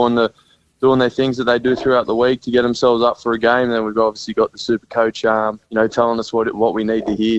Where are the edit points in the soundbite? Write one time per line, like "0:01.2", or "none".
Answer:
0:05.6